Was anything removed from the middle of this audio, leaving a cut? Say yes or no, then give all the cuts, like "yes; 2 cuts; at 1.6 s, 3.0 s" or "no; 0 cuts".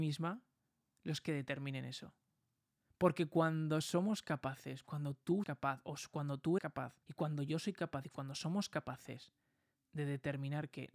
yes; 4 cuts; at 2.8 s, 5.4 s, 6.6 s, 7.0 s